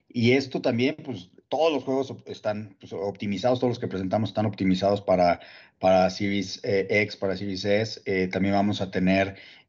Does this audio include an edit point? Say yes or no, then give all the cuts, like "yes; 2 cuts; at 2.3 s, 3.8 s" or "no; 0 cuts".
no; 0 cuts